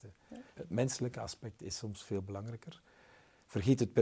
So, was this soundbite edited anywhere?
no; 0 cuts

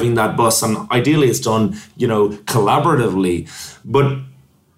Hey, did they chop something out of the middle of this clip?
no; 0 cuts

